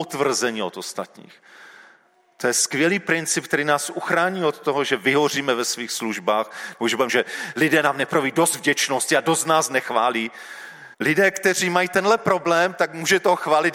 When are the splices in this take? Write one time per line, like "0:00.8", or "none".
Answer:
0:07.1
0:10.9